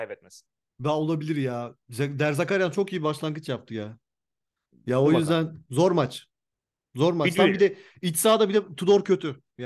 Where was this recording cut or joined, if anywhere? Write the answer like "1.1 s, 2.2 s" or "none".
none